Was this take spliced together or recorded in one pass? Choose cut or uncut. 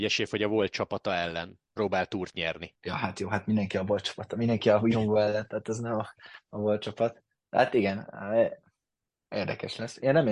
cut